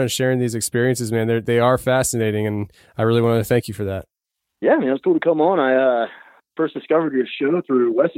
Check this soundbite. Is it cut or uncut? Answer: uncut